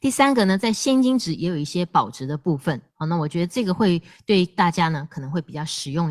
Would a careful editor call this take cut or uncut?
uncut